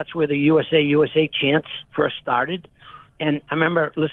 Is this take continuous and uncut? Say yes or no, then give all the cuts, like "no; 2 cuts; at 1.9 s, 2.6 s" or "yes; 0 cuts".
no; 1 cut; at 1.8 s